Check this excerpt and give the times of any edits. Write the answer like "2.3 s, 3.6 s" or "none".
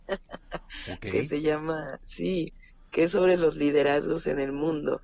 none